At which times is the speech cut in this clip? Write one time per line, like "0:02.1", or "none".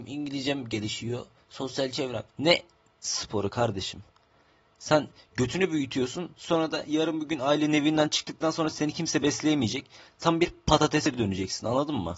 0:02.3